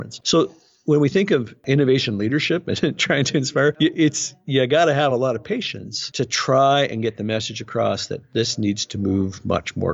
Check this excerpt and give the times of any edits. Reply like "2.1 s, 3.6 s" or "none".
none